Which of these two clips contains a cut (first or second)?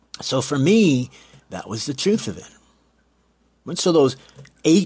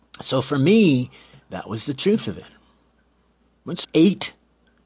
second